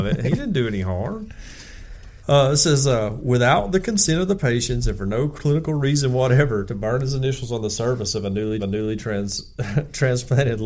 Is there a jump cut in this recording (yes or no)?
yes